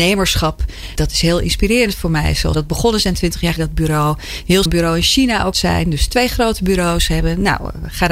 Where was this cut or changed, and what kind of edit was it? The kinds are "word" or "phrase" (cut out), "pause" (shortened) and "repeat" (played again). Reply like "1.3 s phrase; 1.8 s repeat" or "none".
1.0 s word; 2.5 s word; 3.6 s word; 4.7 s word; 5.5 s word

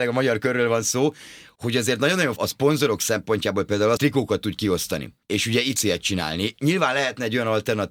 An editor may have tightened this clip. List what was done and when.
1.6 s word; 2.4 s word; 4.0 s word; 5.2 s pause; 5.8 s phrase

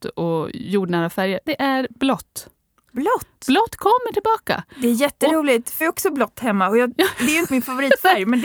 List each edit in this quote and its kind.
1.5 s word; 5.8 s word; 7.5 s word

